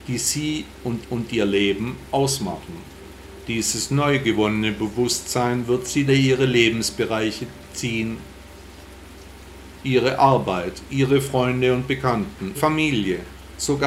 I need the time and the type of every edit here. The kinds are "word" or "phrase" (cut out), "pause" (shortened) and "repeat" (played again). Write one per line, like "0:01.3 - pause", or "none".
0:01.0 - repeat
0:06.1 - phrase
0:12.5 - word